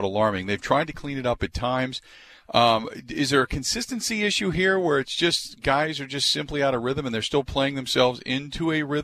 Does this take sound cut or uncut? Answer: uncut